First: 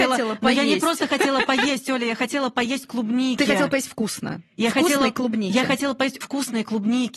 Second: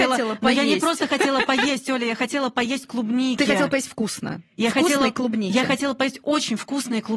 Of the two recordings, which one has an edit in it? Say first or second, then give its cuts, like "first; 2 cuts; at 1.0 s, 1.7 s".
first; 1 cut; at 6.2 s